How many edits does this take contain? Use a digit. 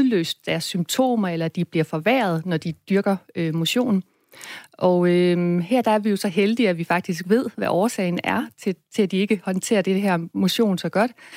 0